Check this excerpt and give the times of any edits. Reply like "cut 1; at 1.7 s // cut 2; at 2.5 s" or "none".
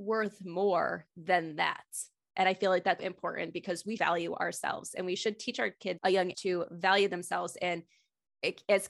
cut 1; at 3.0 s // cut 2; at 4.0 s // cut 3; at 6.0 s // cut 4; at 6.3 s